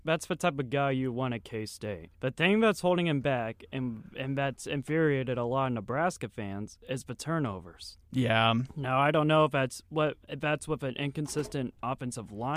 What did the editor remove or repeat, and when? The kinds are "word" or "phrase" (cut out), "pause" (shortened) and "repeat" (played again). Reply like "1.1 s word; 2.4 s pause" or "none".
2.1 s pause; 8.0 s pause; 10.2 s pause